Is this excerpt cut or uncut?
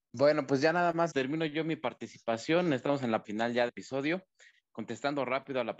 cut